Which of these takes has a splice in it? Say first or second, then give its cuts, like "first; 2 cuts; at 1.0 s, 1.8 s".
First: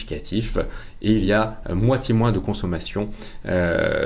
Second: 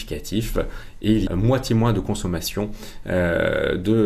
second; 1 cut; at 1.3 s